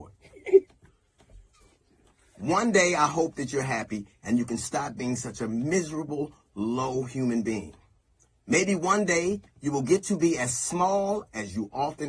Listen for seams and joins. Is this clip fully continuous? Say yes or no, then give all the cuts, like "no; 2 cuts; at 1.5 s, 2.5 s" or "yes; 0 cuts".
yes; 0 cuts